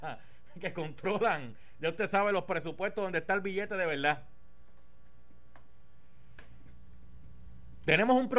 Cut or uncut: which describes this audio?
uncut